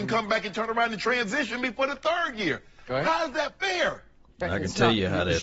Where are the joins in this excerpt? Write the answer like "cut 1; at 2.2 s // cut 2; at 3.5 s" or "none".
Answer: none

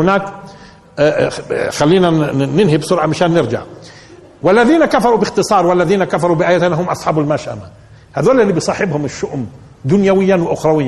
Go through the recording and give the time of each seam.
none

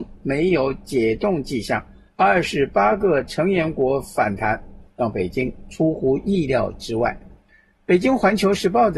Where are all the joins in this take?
none

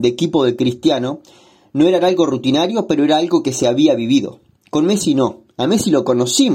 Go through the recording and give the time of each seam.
none

